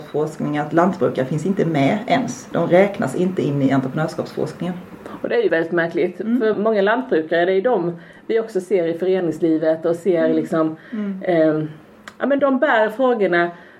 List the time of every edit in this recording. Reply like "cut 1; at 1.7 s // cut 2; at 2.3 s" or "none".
cut 1; at 5.5 s // cut 2; at 6.5 s // cut 3; at 12.4 s